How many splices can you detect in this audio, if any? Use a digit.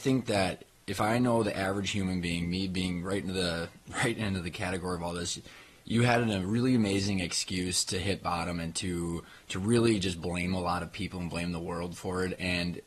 0